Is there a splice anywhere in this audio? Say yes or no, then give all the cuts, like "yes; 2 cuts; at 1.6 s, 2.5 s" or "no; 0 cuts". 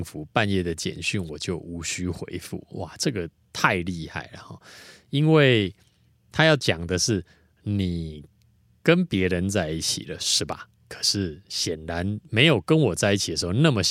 no; 0 cuts